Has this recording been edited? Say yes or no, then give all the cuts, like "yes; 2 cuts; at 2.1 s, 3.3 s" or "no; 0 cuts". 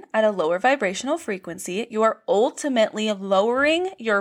no; 0 cuts